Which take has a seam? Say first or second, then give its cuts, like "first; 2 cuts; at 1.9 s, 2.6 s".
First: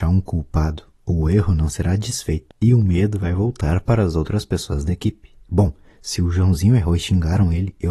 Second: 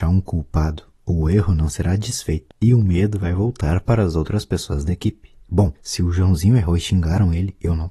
second; 1 cut; at 5.8 s